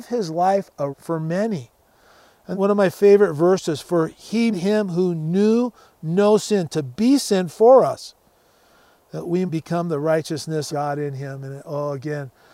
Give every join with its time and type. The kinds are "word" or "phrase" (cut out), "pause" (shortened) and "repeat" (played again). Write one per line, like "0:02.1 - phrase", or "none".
0:00.9 - word
0:02.5 - word
0:04.5 - word
0:09.5 - word
0:10.7 - word